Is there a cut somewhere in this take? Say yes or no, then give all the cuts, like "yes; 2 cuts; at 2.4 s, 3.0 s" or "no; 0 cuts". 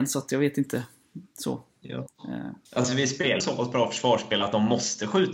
yes; 2 cuts; at 2.7 s, 3.4 s